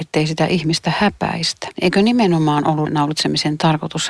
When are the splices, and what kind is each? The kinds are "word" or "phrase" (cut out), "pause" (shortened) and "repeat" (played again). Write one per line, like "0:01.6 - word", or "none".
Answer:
0:01.7 - word
0:02.9 - word